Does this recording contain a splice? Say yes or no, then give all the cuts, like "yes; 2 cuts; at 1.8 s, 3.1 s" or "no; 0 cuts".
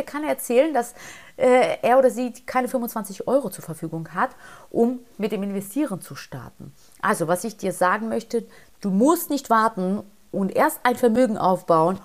no; 0 cuts